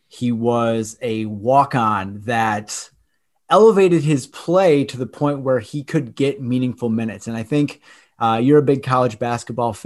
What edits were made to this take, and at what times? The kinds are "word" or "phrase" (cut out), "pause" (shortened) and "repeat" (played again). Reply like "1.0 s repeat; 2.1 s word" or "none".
none